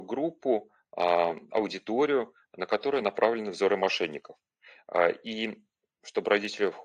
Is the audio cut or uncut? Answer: uncut